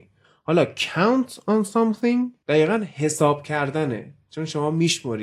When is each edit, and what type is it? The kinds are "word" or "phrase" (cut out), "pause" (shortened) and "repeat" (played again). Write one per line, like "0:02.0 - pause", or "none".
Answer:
0:02.4 - pause